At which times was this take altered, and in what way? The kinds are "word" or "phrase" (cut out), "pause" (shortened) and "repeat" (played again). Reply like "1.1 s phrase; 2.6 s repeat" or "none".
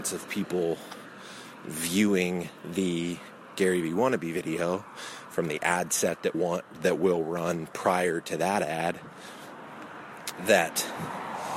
6.3 s word; 10.4 s word